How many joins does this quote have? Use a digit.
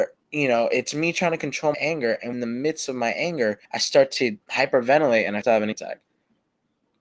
6